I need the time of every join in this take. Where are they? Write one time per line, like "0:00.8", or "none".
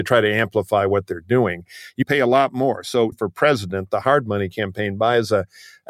0:02.0
0:03.1